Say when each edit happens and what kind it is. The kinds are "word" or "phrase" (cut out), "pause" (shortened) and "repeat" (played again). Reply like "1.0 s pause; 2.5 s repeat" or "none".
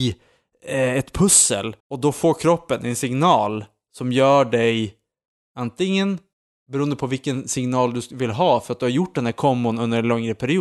1.8 s pause; 6.3 s pause